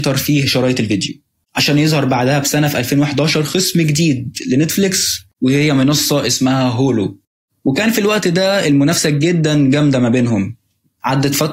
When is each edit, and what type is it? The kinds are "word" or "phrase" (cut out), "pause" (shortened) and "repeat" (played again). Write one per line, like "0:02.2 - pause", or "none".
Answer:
none